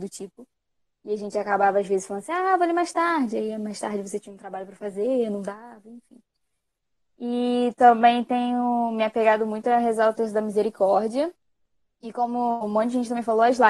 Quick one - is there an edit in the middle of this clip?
no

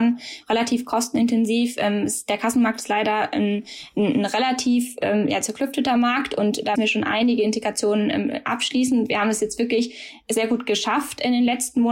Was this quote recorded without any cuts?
no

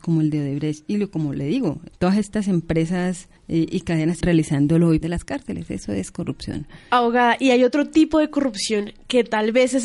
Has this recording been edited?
yes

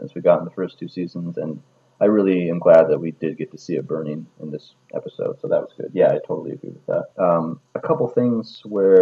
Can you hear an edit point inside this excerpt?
yes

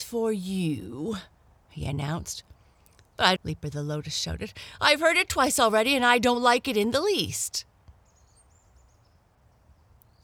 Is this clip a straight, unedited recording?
no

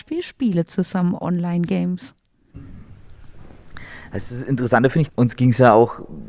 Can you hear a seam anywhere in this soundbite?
yes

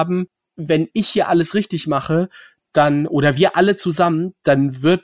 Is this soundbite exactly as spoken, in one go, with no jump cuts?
yes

